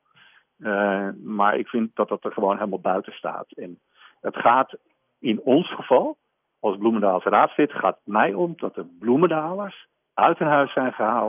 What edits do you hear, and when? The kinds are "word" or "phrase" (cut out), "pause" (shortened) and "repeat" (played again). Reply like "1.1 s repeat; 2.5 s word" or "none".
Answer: none